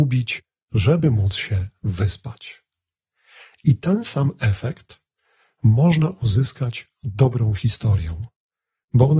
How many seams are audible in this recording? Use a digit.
0